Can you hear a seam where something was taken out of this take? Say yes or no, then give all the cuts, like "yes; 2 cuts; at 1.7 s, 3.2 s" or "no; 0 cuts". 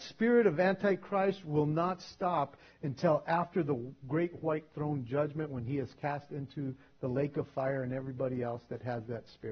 no; 0 cuts